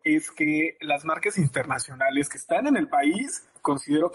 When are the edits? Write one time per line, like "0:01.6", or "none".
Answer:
none